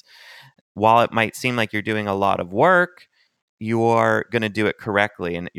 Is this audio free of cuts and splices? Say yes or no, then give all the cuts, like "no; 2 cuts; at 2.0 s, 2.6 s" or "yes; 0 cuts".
yes; 0 cuts